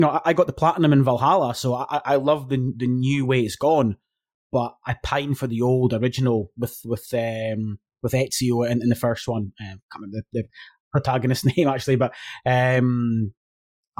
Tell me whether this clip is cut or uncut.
uncut